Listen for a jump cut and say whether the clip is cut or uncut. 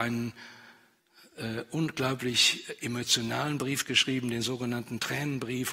uncut